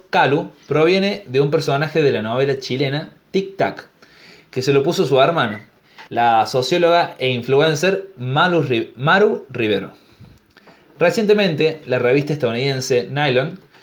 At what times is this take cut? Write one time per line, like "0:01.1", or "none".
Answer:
0:06.1